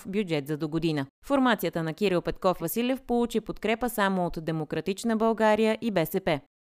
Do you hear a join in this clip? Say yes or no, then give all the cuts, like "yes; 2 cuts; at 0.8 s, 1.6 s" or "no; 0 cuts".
yes; 2 cuts; at 1.1 s, 2.6 s